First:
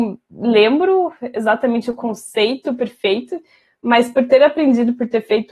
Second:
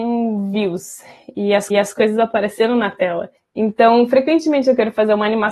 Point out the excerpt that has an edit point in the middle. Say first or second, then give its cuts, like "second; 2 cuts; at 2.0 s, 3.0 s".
second; 2 cuts; at 1.7 s, 3.4 s